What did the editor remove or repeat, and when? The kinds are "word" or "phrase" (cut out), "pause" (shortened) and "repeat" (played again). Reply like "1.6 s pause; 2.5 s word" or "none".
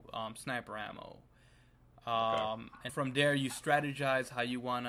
2.9 s word